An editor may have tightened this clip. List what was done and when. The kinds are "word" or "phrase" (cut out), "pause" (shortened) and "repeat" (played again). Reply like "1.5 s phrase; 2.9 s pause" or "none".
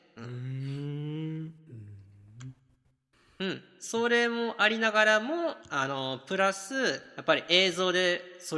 5.6 s pause